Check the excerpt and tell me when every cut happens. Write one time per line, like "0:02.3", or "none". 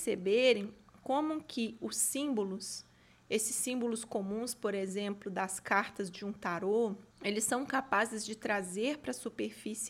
0:07.1